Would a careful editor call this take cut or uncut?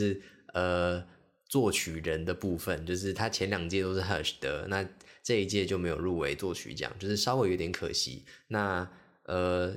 uncut